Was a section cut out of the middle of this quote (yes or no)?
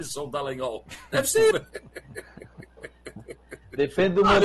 yes